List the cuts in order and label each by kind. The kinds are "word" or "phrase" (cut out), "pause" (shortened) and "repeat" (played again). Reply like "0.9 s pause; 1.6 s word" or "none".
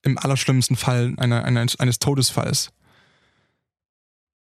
1.2 s word